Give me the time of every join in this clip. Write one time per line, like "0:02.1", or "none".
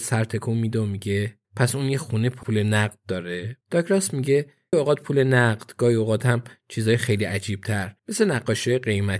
0:01.4
0:02.4
0:03.6
0:04.7
0:08.0

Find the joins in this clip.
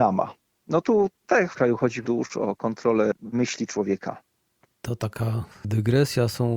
0:01.5
0:02.0
0:03.3

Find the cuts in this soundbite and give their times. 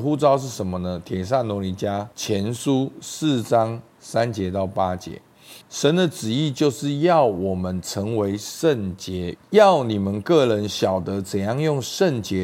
0:02.1
0:05.6
0:09.4

